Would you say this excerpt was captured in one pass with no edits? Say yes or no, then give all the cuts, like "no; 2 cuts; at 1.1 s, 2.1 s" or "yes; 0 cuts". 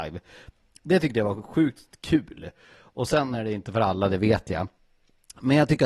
yes; 0 cuts